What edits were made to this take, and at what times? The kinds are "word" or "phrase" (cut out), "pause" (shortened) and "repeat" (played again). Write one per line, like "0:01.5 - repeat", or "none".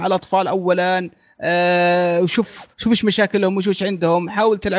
0:02.7 - pause